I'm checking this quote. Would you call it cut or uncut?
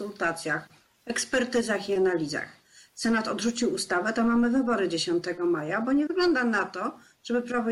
uncut